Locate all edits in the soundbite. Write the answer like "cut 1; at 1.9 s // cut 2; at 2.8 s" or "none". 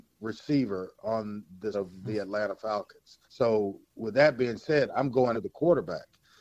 cut 1; at 1.7 s // cut 2; at 3.2 s // cut 3; at 5.3 s